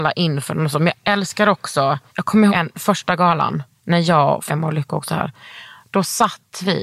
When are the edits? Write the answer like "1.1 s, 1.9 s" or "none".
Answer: 2.1 s, 2.5 s, 4.5 s